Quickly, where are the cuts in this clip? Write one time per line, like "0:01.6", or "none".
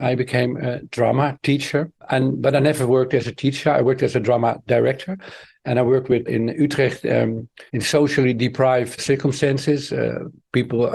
0:06.3
0:07.7
0:09.0